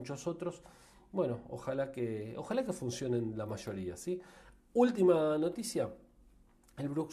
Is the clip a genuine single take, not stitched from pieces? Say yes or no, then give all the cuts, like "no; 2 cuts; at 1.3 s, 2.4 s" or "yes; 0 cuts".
yes; 0 cuts